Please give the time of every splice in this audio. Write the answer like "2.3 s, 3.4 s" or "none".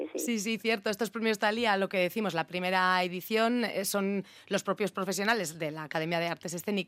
none